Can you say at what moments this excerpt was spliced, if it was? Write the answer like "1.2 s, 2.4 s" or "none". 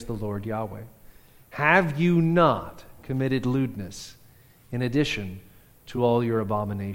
none